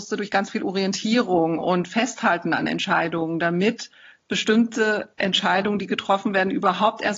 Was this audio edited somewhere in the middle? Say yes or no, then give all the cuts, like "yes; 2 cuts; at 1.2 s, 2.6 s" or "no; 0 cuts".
no; 0 cuts